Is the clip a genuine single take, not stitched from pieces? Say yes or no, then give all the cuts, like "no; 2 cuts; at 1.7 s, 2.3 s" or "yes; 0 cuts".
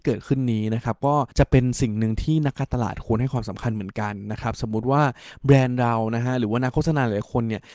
no; 1 cut; at 1.3 s